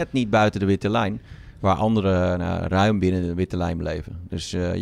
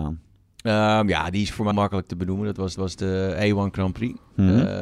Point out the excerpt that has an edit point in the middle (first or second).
second